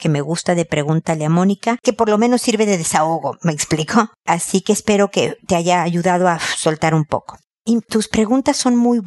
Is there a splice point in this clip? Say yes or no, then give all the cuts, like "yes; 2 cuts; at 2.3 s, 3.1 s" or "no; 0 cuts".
yes; 1 cut; at 1.8 s